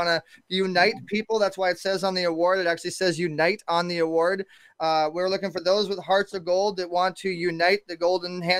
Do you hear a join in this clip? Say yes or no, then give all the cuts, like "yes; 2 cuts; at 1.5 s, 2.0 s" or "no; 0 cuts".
no; 0 cuts